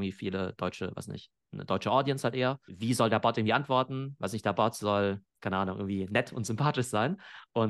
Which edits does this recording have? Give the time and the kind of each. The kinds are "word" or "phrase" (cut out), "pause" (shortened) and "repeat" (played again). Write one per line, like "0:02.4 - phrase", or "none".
none